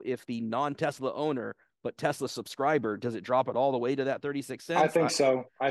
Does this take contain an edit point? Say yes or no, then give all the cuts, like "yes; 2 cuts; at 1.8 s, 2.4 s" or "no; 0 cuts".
no; 0 cuts